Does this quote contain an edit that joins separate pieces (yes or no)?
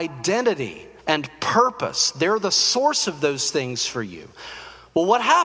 yes